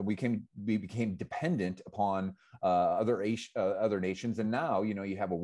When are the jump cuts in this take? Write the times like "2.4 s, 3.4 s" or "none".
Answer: none